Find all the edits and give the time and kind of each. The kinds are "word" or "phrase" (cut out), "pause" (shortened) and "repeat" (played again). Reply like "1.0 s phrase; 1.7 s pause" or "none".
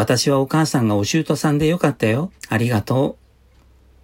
2.4 s pause